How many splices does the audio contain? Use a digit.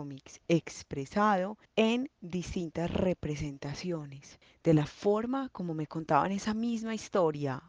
1